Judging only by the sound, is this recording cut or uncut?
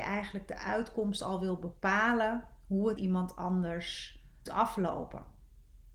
cut